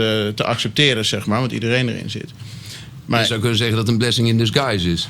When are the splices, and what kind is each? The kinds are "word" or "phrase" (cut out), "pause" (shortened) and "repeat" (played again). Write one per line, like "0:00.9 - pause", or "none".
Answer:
none